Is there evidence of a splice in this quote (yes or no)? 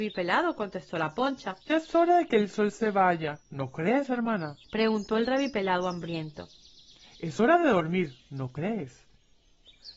yes